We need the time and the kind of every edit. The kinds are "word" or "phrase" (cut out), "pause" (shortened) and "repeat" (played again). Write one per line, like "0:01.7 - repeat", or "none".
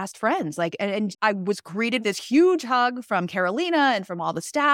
0:01.1 - word
0:02.0 - word

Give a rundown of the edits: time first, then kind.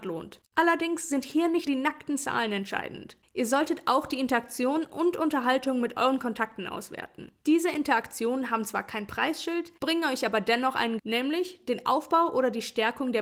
0:01.7 - word
0:07.4 - pause
0:09.8 - pause
0:11.0 - word

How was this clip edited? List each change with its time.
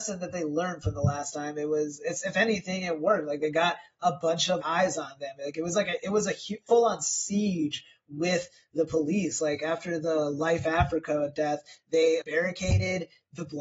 0:04.6 - word
0:12.2 - word

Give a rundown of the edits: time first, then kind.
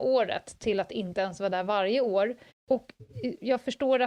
0:02.5 - pause

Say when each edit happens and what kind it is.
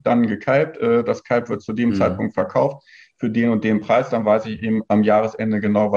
none

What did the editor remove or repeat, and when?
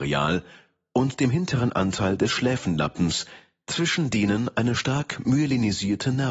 none

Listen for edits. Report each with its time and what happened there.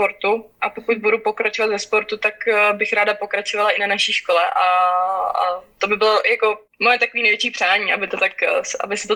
0:06.7 - pause

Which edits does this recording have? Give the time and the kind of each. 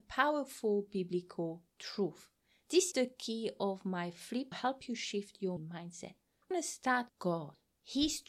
0:02.9 - word
0:04.5 - phrase
0:05.6 - word
0:06.5 - word
0:07.1 - word

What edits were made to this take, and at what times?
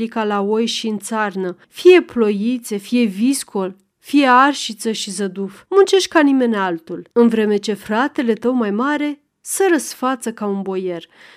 0:01.6 - pause
0:05.7 - pause
0:07.1 - pause

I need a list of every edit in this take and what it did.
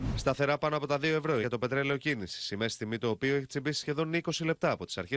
0:01.4 - word

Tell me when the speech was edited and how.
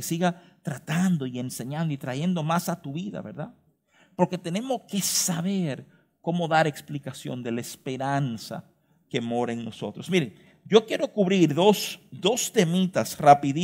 none

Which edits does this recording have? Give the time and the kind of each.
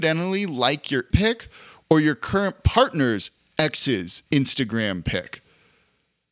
0:01.1 - phrase
0:04.3 - pause

